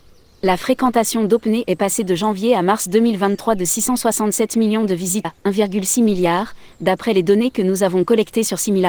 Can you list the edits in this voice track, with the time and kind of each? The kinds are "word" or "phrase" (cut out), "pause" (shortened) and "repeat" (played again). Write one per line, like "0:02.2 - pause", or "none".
0:05.2 - word